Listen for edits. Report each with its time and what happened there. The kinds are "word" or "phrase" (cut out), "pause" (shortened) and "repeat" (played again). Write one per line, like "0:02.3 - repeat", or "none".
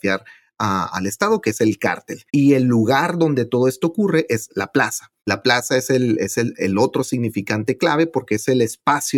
0:02.3 - pause
0:05.2 - pause